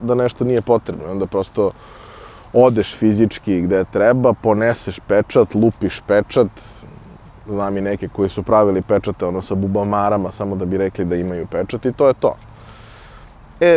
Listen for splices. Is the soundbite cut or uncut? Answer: uncut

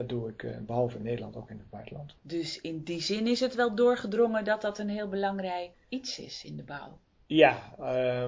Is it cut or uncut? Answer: cut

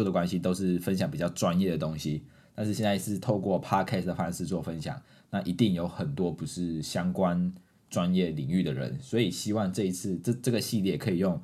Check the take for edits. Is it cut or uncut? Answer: uncut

